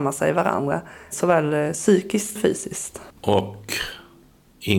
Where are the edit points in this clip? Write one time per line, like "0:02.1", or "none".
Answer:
0:02.4
0:03.1